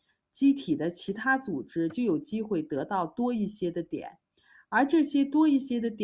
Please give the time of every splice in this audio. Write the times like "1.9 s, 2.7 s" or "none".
none